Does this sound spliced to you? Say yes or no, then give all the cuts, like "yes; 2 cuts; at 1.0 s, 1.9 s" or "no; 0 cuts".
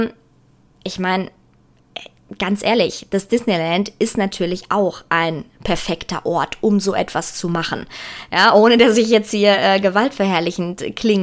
no; 0 cuts